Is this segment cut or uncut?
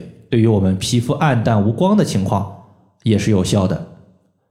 uncut